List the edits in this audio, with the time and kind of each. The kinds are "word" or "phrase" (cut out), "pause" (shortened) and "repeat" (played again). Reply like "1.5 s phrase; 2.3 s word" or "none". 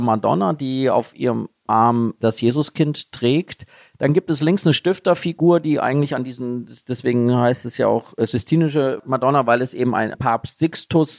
none